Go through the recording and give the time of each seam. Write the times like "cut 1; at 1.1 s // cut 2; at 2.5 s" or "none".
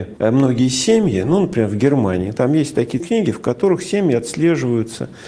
cut 1; at 3.0 s

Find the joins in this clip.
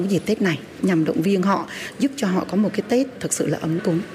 none

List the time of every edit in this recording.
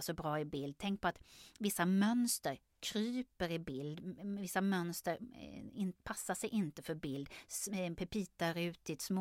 none

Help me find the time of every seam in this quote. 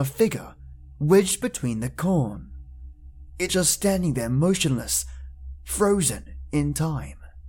cut 1; at 3.5 s

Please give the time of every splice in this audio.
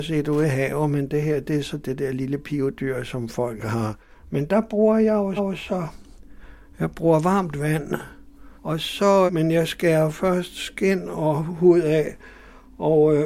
cut 1; at 5.4 s // cut 2; at 8.5 s // cut 3; at 9.3 s

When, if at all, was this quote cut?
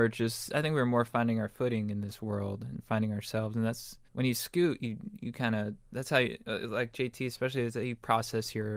cut 1; at 4.1 s

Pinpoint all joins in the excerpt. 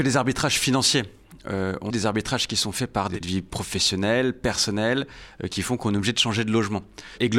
cut 1; at 1.9 s // cut 2; at 3.2 s

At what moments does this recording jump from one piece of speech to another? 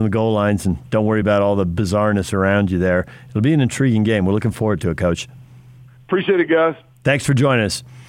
none

